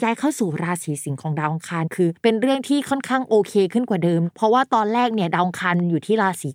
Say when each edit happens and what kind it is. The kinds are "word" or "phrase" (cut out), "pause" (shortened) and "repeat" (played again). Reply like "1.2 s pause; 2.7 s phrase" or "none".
2.2 s pause